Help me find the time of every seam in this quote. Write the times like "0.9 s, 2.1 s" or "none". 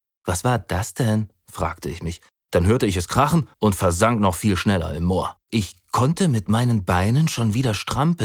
2.3 s, 3.5 s, 5.4 s

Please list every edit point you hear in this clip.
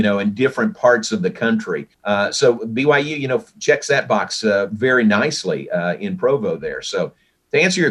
1.9 s

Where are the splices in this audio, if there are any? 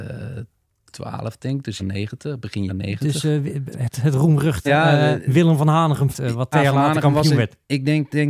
1.8 s, 2.7 s, 3.7 s, 4.7 s, 5.2 s, 6.1 s, 6.5 s

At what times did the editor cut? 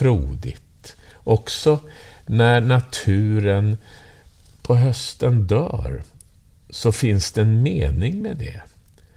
none

